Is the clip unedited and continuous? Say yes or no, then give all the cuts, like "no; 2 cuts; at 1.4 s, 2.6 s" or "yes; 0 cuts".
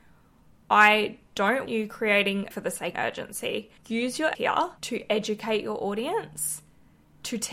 no; 6 cuts; at 1.7 s, 2.5 s, 2.9 s, 3.8 s, 4.3 s, 4.8 s